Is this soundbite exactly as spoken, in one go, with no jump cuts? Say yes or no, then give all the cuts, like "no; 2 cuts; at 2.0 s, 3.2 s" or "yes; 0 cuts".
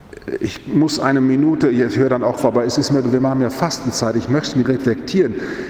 no; 2 cuts; at 2.4 s, 4.6 s